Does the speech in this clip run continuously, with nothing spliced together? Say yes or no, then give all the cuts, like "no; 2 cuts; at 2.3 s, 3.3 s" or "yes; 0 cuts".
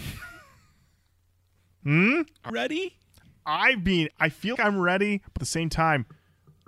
no; 4 cuts; at 2.5 s, 4.1 s, 4.6 s, 5.4 s